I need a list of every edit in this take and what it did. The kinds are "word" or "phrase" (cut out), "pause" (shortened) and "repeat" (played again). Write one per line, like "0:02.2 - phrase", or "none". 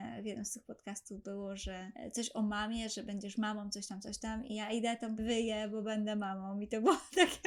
0:05.2 - phrase